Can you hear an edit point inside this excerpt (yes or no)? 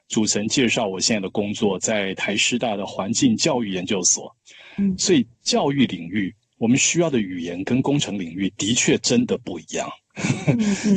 no